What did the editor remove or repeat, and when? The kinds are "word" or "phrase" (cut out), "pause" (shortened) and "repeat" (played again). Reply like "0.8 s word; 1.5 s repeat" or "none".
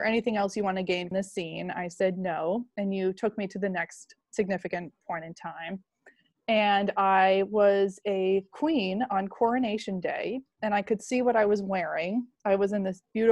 1.1 s word